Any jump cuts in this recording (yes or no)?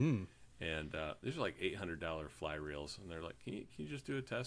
no